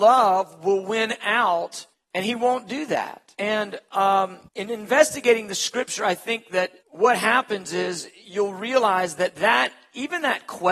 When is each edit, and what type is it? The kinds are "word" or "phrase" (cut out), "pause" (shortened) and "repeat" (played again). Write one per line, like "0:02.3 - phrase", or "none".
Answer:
0:01.9 - pause
0:03.3 - pause
0:04.5 - pause
0:06.8 - pause